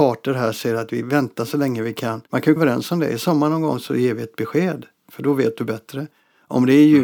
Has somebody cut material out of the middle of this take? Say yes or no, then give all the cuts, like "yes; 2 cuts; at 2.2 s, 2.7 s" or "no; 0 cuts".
yes; 2 cuts; at 2.3 s, 2.6 s